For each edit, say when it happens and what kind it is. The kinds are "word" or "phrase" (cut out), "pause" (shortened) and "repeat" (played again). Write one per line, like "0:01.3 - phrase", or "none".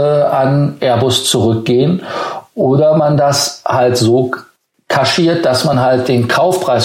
none